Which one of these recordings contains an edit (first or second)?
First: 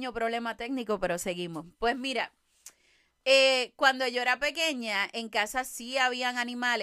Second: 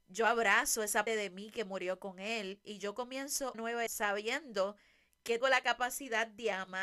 second